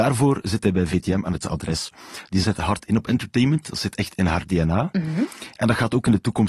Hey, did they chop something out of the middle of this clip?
yes; 2 cuts; at 1.4 s, 2.4 s

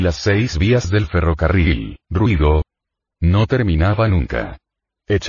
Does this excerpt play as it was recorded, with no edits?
no; 1 cut; at 2.0 s

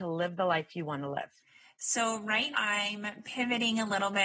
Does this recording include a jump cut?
yes; 1 cut; at 2.5 s

